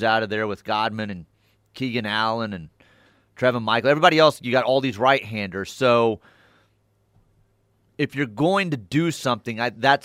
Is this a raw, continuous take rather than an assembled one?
yes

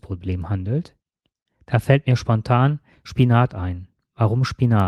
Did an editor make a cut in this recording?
no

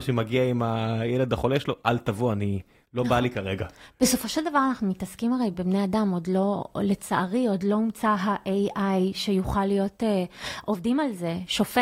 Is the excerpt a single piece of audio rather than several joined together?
yes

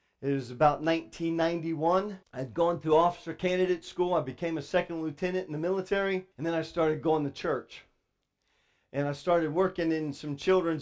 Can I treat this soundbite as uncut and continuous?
no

